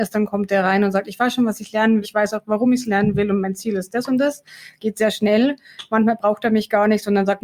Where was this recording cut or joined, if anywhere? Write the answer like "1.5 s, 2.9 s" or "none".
2.0 s